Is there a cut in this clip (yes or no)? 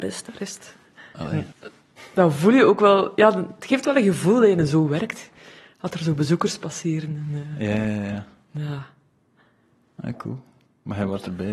yes